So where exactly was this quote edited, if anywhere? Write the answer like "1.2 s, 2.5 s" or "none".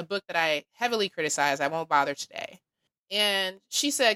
2.9 s